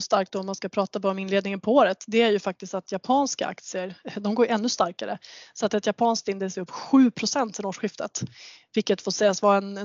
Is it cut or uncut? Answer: uncut